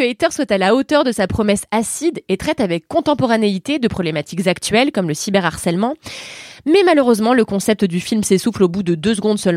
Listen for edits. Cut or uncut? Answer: uncut